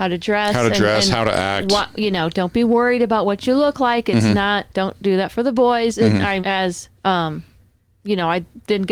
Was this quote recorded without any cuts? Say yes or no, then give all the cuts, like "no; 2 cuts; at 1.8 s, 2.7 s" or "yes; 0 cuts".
no; 3 cuts; at 4.7 s, 6.4 s, 7.0 s